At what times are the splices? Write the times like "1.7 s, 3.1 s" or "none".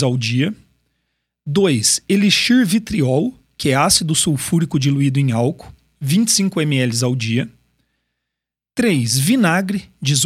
none